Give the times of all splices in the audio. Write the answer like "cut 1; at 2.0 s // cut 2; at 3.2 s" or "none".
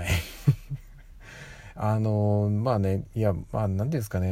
none